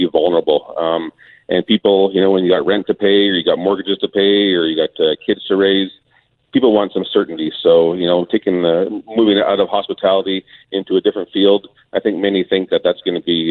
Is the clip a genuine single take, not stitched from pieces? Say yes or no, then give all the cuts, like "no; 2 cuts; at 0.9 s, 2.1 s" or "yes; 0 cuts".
yes; 0 cuts